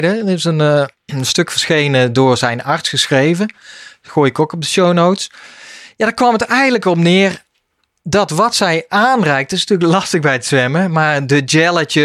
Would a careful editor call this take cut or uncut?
uncut